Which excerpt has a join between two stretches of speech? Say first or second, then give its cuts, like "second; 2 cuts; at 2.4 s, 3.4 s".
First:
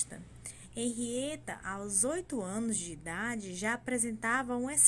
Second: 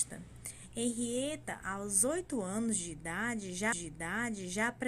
second; 1 cut; at 3.7 s